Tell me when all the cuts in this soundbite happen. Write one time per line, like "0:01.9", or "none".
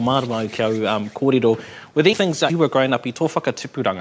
0:02.1
0:02.5